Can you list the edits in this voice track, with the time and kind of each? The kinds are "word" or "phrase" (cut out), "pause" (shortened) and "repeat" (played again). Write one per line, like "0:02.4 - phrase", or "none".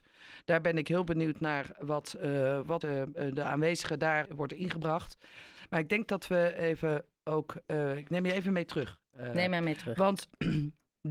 0:02.8 - word
0:04.2 - word